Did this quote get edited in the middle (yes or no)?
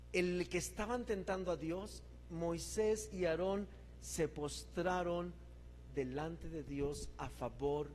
no